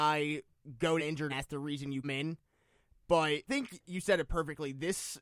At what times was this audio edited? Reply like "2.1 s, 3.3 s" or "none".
1.0 s, 1.3 s, 2.0 s, 3.5 s